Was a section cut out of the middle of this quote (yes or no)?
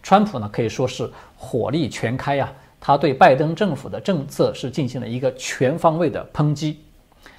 no